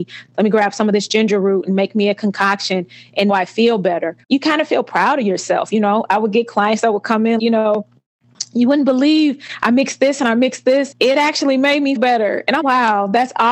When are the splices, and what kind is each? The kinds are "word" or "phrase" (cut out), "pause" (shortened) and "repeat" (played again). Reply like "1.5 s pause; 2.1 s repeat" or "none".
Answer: 3.3 s word; 4.2 s pause; 7.4 s word; 10.9 s word; 12.0 s word; 12.6 s word